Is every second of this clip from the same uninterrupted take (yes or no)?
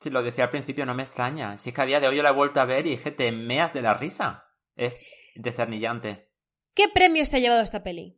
yes